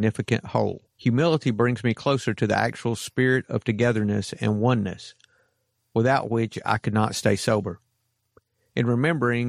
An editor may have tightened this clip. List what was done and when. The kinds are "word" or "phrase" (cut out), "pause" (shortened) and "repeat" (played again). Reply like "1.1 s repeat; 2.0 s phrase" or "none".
0.9 s pause